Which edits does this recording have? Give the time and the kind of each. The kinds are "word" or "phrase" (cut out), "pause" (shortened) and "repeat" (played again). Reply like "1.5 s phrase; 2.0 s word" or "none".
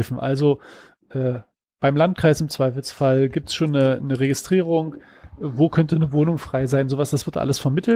none